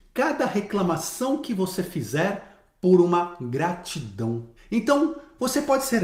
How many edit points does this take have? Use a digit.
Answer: 1